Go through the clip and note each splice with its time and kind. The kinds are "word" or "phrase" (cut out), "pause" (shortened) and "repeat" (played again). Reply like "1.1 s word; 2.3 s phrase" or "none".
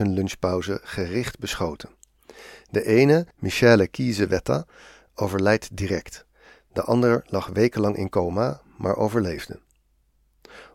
3.3 s pause